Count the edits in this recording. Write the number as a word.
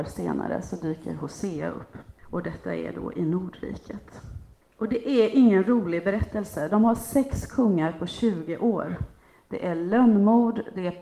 zero